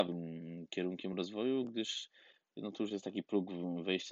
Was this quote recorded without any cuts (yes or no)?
yes